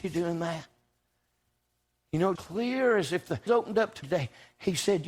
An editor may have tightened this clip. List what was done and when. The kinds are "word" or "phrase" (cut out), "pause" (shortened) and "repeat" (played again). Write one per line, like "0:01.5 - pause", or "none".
0:02.4 - word
0:03.5 - word
0:04.0 - word